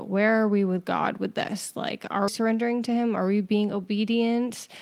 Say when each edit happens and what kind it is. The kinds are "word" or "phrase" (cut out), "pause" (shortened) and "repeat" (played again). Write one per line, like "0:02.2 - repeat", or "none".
0:02.3 - word